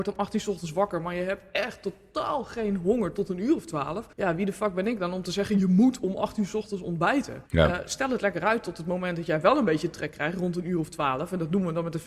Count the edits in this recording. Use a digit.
2